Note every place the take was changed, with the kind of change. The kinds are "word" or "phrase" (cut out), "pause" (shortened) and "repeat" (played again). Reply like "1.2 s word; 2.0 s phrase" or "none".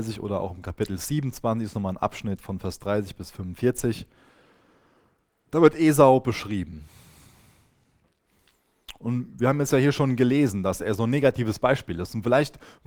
none